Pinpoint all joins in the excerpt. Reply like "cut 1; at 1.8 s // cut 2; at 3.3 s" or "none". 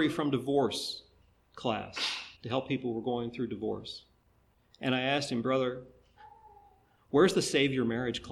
cut 1; at 2.4 s